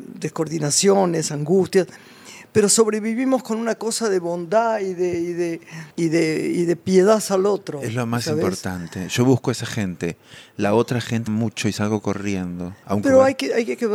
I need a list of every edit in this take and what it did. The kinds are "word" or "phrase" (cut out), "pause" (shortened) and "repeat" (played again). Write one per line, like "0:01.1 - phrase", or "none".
0:05.9 - pause
0:11.3 - phrase